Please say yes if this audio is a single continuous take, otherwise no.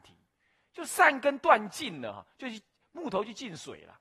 yes